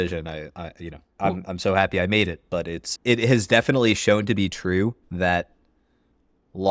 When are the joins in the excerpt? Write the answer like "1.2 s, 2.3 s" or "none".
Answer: 5.0 s